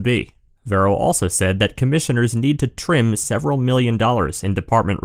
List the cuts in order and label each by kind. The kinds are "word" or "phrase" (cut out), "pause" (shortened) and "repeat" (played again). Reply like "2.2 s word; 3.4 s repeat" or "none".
none